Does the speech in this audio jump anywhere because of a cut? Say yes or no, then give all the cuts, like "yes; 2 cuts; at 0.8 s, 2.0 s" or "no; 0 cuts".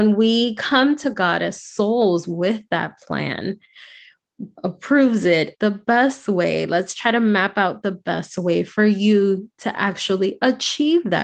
yes; 2 cuts; at 4.5 s, 5.5 s